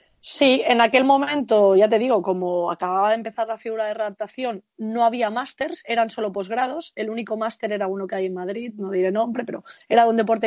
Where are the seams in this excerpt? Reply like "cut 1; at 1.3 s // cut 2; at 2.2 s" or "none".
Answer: none